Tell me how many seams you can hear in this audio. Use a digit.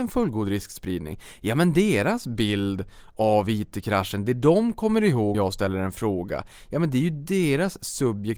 1